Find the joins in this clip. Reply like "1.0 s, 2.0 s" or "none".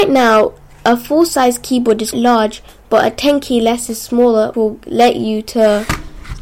2.1 s, 4.5 s